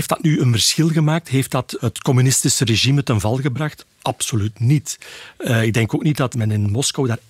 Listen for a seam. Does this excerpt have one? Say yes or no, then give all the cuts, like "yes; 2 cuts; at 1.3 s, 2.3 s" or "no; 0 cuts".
no; 0 cuts